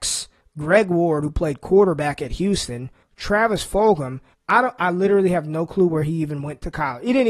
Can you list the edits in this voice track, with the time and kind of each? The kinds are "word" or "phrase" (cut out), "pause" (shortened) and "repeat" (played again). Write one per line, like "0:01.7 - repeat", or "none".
none